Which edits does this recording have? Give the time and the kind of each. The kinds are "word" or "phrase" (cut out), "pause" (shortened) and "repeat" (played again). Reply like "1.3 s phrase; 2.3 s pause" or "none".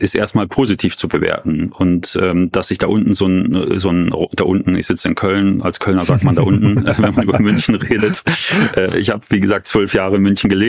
none